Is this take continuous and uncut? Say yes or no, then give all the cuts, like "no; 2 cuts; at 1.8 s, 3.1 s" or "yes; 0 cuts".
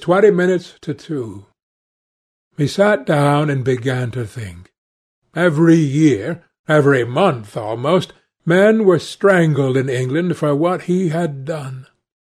yes; 0 cuts